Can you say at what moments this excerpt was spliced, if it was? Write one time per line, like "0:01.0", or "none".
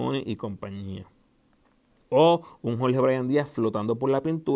none